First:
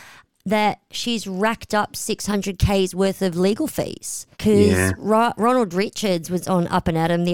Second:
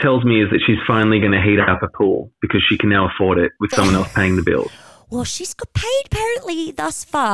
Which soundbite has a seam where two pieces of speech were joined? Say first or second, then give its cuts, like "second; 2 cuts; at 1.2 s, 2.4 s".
first; 1 cut; at 4.3 s